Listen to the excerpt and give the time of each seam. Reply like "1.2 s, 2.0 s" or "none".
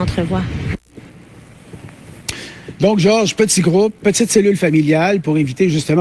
none